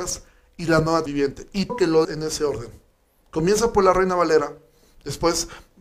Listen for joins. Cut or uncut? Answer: cut